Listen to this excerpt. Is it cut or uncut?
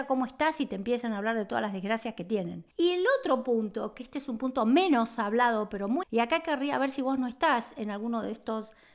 cut